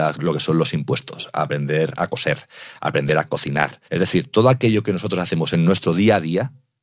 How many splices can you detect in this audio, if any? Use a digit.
1